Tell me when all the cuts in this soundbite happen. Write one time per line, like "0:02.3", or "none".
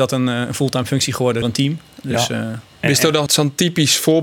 0:01.4
0:03.3